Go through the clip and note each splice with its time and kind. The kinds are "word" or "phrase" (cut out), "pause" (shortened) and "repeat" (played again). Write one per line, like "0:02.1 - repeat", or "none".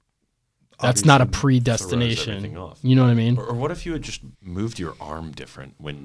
0:04.3 - pause